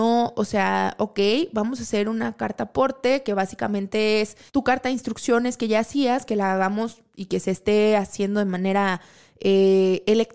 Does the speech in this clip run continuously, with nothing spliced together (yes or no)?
no